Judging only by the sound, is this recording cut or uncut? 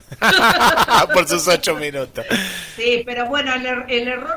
uncut